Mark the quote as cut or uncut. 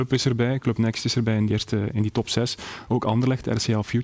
cut